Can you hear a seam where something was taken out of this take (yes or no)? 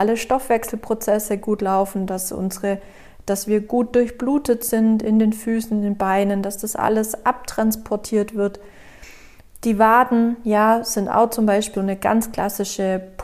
yes